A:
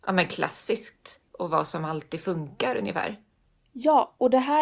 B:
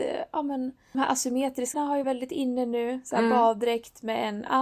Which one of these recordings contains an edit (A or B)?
B